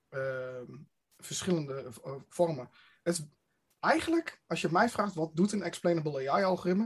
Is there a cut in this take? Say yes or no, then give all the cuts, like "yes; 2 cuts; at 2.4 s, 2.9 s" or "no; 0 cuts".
no; 0 cuts